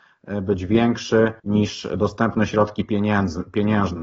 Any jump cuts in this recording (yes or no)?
yes